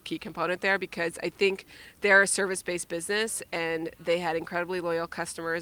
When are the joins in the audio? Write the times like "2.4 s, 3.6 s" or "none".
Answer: none